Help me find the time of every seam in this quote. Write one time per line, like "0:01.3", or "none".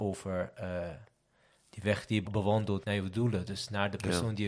0:02.2
0:02.8